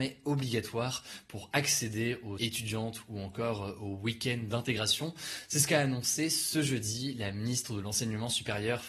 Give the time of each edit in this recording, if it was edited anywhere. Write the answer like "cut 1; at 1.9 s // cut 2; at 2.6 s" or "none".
cut 1; at 2.4 s